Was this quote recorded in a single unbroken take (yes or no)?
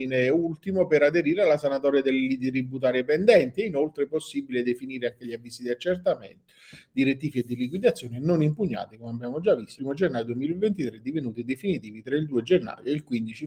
no